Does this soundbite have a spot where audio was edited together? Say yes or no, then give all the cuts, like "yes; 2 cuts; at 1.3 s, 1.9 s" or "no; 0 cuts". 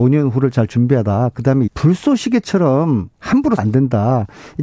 yes; 2 cuts; at 1.7 s, 3.6 s